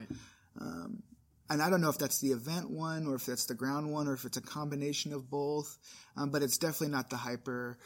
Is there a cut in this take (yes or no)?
no